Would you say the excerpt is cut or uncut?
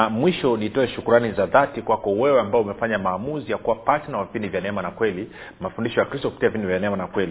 uncut